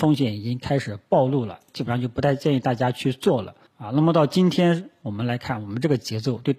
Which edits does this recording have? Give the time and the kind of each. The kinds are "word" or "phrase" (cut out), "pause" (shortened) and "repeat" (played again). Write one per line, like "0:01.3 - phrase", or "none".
0:03.7 - pause

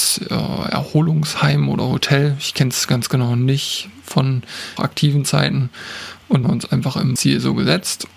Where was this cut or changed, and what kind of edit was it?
0:04.8 - word
0:06.4 - phrase
0:07.2 - phrase

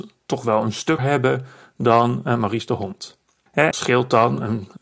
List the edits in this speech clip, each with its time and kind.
0:01.0 - word
0:03.7 - word

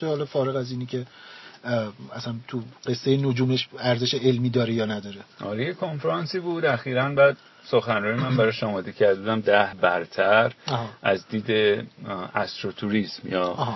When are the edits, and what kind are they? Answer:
0:05.3 - pause
0:09.7 - word

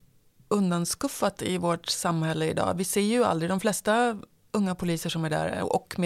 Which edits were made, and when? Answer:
none

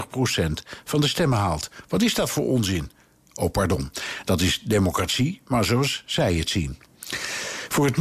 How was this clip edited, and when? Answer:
none

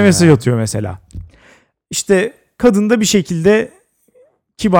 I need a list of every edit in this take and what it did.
none

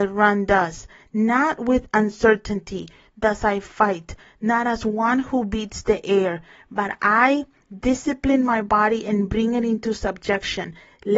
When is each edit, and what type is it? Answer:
none

